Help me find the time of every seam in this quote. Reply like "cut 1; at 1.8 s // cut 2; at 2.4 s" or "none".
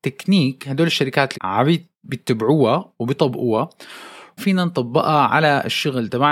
cut 1; at 1.3 s // cut 2; at 4.4 s